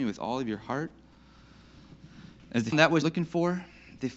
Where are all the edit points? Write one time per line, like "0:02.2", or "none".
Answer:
0:02.7
0:03.0